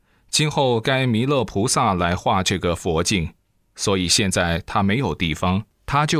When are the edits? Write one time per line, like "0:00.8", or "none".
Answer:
none

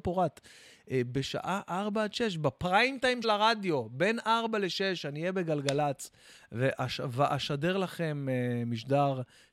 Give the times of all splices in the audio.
0:03.2

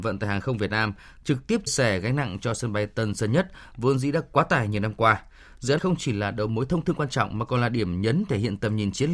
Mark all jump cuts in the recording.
0:01.7
0:05.8

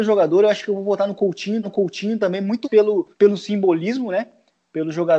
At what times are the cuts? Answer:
0:01.6
0:02.6
0:03.1

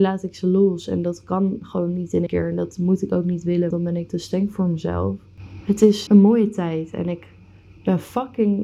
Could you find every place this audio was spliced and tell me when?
0:02.3
0:03.7
0:04.1
0:06.1

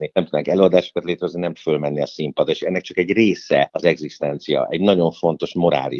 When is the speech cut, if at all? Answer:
0:01.5

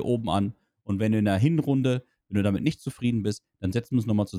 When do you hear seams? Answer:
none

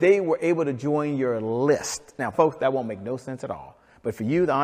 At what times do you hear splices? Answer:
0:02.3

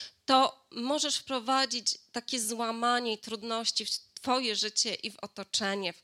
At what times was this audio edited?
none

